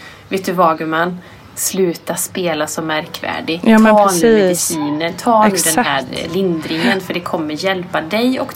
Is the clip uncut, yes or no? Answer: yes